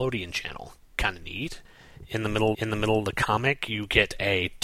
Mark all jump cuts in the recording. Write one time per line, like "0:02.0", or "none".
0:02.5